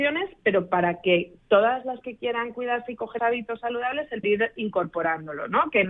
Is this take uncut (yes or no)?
no